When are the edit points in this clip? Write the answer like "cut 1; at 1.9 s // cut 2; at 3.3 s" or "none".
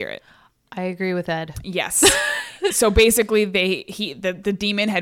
cut 1; at 2.7 s